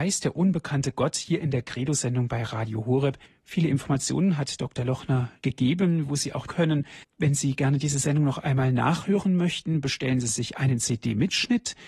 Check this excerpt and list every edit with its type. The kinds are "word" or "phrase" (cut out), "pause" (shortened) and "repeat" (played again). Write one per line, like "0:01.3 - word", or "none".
0:03.3 - pause
0:05.4 - word
0:06.5 - phrase
0:07.0 - pause